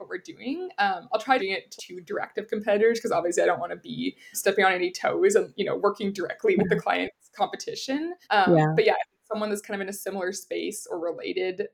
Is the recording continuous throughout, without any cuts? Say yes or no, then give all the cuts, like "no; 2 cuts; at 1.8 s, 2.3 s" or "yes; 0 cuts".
no; 4 cuts; at 1.4 s, 1.8 s, 4.3 s, 8.2 s